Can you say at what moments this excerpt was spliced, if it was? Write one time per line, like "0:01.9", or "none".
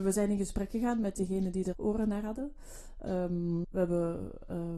0:01.7
0:03.6